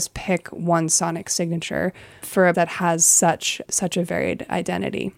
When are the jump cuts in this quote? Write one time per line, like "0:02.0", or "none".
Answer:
0:02.2
0:02.5
0:03.6